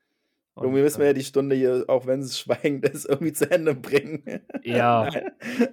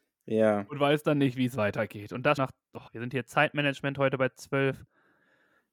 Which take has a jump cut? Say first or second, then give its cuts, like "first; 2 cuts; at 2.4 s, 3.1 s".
second; 2 cuts; at 2.4 s, 2.9 s